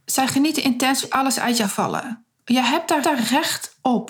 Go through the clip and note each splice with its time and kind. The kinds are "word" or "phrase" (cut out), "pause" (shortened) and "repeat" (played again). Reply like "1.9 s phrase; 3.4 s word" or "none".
1.0 s phrase; 1.6 s phrase; 3.0 s repeat